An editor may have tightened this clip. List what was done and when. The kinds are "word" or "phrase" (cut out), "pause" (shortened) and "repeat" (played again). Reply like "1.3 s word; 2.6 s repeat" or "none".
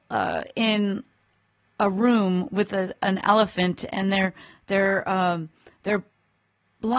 none